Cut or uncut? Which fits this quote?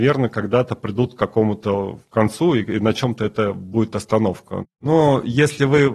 uncut